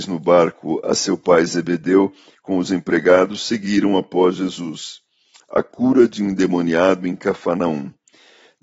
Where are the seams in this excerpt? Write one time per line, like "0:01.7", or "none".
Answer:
none